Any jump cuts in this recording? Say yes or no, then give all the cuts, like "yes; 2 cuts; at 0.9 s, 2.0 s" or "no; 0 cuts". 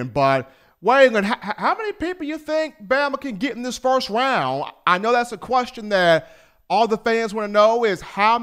no; 0 cuts